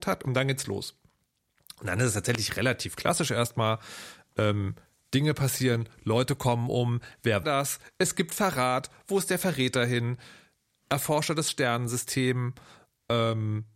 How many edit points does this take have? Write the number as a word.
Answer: one